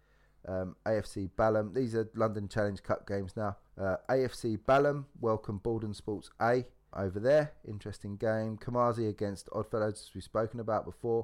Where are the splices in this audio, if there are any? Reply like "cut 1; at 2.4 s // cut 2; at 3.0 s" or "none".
cut 1; at 3.7 s // cut 2; at 6.9 s